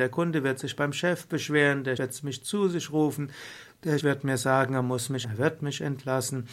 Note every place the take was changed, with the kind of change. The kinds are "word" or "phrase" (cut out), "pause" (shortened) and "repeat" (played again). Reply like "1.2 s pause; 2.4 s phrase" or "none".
2.0 s word; 4.0 s word; 5.2 s word